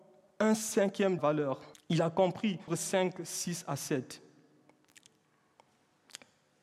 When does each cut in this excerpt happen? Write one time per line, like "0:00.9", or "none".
0:01.2
0:01.7
0:02.7